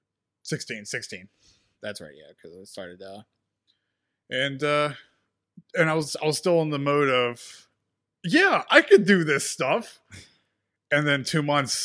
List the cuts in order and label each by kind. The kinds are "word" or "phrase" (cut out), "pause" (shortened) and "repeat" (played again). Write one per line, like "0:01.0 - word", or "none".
none